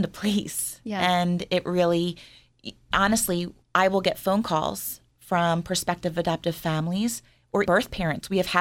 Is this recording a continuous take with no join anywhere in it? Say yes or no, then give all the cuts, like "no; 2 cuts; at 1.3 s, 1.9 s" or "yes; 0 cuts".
no; 2 cuts; at 3.6 s, 7.7 s